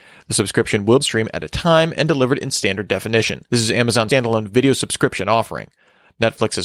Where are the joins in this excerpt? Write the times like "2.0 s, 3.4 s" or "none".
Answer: 1.0 s, 3.5 s, 4.1 s

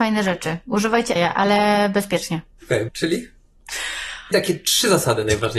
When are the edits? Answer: 1.2 s, 2.9 s, 4.3 s

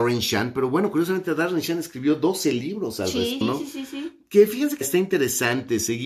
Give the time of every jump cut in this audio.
3.4 s, 4.8 s

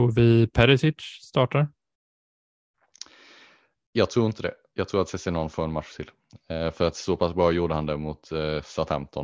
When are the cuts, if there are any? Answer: none

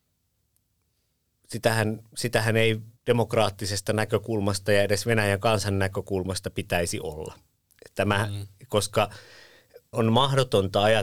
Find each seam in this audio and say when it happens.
3.0 s, 9.9 s

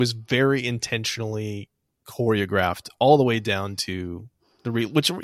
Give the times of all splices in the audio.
none

